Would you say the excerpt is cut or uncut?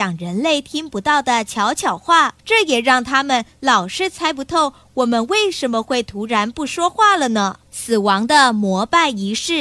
cut